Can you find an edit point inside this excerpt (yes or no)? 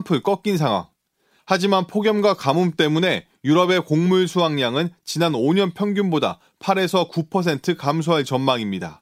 no